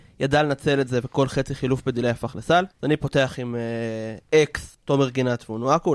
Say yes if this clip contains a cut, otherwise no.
yes